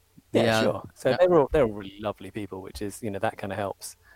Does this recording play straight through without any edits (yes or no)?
yes